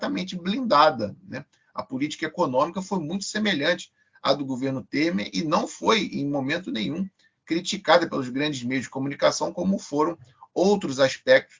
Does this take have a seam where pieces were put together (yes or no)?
no